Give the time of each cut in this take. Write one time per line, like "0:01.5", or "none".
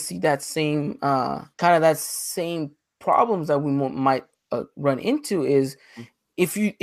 0:01.5